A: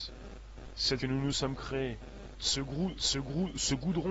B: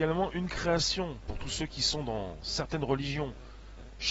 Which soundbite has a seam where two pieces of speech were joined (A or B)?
A